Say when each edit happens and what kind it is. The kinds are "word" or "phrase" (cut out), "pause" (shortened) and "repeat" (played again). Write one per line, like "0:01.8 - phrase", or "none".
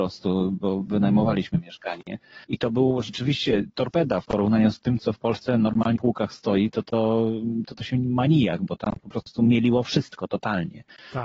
0:02.4 - pause
0:05.0 - word
0:06.0 - word